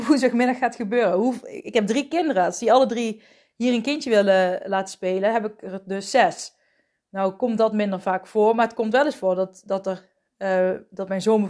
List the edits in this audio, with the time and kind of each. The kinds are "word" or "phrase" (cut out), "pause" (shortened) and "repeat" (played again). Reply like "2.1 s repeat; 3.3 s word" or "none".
none